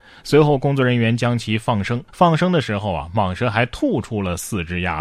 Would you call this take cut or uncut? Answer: cut